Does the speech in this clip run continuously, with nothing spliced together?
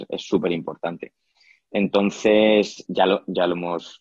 no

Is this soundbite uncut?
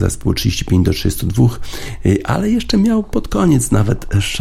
yes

